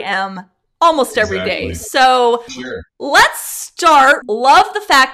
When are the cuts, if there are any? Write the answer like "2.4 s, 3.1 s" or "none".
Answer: 2.5 s, 2.9 s, 4.2 s